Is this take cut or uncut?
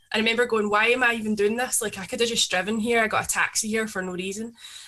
uncut